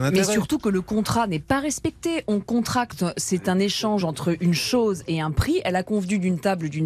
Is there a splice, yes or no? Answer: no